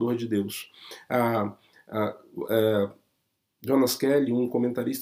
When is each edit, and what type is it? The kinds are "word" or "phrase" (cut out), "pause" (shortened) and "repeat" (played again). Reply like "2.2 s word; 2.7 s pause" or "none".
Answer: none